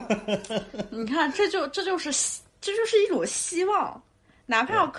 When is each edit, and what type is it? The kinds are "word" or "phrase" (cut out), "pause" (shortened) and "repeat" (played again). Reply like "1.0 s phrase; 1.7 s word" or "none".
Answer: none